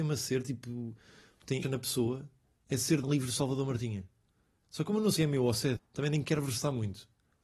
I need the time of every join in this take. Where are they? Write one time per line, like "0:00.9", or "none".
0:01.6
0:03.0
0:05.2
0:05.8